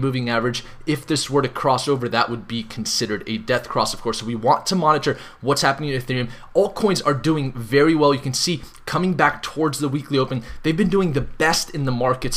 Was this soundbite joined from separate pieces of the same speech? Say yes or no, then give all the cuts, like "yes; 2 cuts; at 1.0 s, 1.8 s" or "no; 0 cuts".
no; 0 cuts